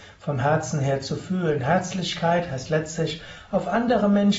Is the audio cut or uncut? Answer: uncut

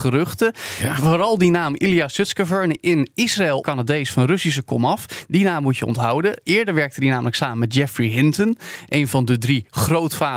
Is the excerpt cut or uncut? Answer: cut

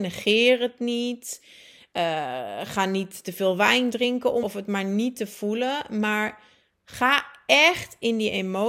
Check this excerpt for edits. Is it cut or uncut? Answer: cut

